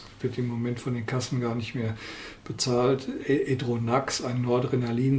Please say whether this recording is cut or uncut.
uncut